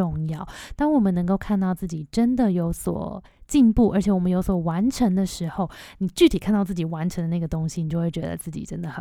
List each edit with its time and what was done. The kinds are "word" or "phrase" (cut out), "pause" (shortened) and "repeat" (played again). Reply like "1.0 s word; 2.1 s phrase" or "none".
none